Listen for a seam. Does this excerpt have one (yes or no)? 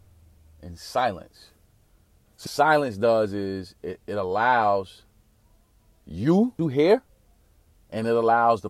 yes